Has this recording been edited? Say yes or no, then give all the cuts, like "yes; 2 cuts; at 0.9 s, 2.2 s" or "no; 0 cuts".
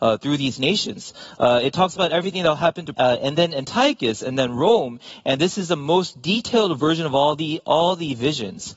yes; 1 cut; at 2.9 s